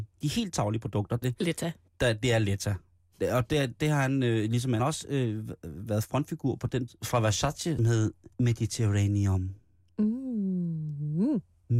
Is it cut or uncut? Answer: cut